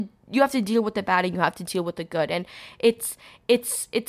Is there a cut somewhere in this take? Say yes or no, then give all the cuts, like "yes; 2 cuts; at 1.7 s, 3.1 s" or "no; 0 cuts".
no; 0 cuts